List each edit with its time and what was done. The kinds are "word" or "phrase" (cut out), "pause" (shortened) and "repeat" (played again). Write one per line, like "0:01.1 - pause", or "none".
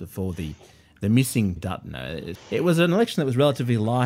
0:01.6 - word
0:02.4 - word